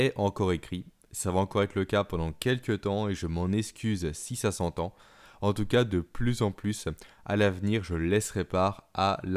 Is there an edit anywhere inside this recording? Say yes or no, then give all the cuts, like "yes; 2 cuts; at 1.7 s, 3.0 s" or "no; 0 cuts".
no; 0 cuts